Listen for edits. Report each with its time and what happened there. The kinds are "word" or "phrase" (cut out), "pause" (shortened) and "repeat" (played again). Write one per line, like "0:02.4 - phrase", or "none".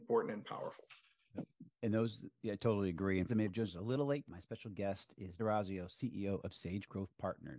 0:01.7 - pause
0:03.3 - phrase
0:04.3 - word
0:05.4 - word